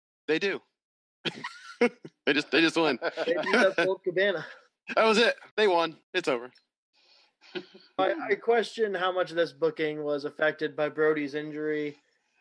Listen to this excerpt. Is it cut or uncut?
cut